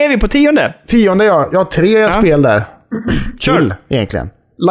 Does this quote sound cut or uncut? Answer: uncut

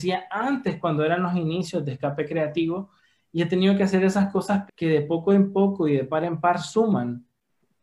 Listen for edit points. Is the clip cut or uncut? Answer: cut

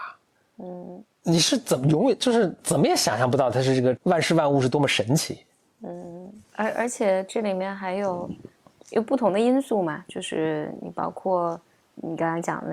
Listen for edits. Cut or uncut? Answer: cut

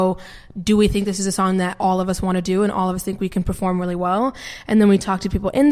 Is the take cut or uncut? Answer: uncut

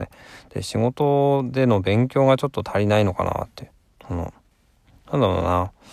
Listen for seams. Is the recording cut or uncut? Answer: uncut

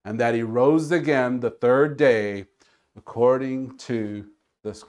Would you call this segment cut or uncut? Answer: uncut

